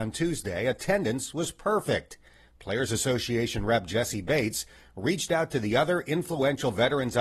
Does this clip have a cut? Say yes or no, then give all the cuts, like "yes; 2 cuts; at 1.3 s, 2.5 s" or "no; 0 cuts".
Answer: no; 0 cuts